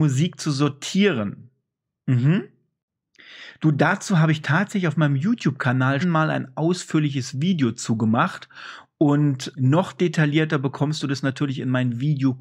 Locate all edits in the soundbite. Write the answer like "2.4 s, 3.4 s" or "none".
6.0 s, 9.5 s